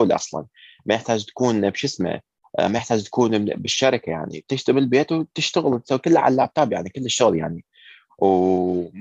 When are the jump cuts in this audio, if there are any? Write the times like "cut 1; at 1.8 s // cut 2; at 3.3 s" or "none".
none